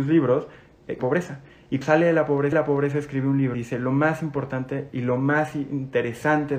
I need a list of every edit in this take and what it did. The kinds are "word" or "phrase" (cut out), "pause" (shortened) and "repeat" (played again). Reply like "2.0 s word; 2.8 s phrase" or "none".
1.0 s phrase; 1.8 s word; 2.5 s repeat; 3.5 s word